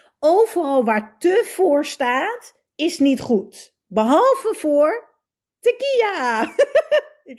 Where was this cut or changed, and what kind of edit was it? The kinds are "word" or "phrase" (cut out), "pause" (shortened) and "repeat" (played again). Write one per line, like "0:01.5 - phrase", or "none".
none